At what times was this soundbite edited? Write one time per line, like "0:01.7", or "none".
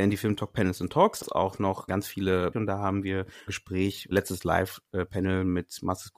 0:01.2
0:01.9
0:02.5
0:03.5
0:04.1